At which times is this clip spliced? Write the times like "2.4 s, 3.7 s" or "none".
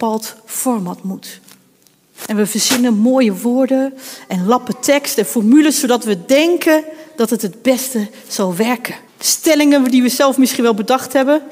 9.1 s